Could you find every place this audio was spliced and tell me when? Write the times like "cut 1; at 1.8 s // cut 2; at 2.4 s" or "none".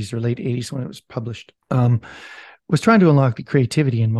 cut 1; at 1.6 s